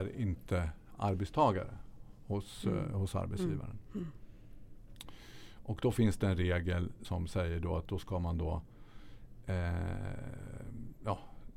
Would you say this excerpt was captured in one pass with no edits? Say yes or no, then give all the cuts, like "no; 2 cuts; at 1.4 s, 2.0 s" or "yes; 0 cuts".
no; 1 cut; at 7.0 s